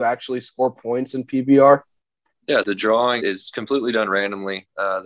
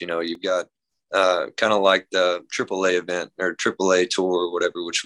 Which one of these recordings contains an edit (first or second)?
first